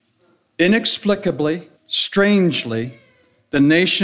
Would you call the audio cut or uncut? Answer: cut